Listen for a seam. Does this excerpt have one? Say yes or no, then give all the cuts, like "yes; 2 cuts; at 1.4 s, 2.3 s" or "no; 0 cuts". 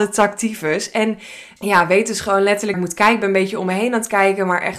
yes; 2 cuts; at 1.6 s, 2.7 s